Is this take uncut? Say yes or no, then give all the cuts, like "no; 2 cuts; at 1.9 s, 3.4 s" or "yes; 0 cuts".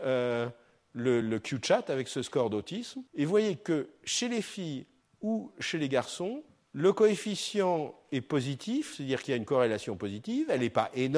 no; 4 cuts; at 1.2 s, 3.1 s, 5.0 s, 6.5 s